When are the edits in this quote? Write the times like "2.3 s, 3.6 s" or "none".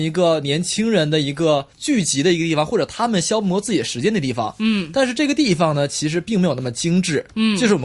1.7 s